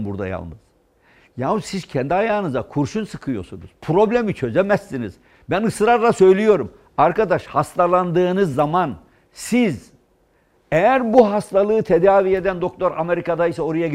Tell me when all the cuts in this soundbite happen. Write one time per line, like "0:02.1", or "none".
none

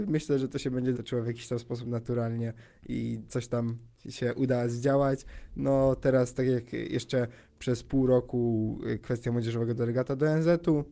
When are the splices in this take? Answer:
0:00.9
0:03.3

